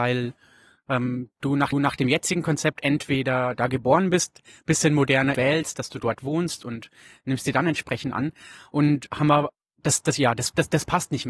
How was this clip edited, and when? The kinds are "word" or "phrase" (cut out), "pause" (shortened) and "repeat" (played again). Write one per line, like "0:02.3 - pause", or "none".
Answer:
0:01.7 - repeat
0:05.3 - phrase